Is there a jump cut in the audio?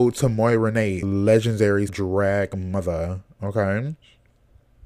yes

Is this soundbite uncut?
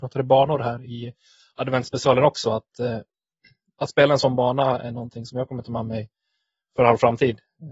yes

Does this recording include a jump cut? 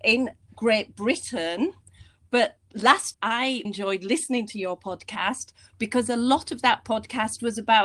yes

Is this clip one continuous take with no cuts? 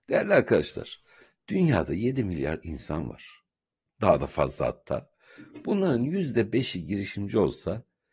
yes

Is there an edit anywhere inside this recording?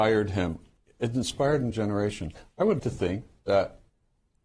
yes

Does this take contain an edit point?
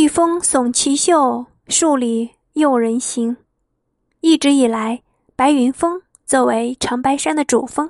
no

